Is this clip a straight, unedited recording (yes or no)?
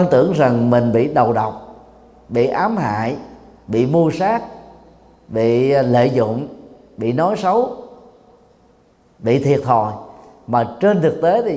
yes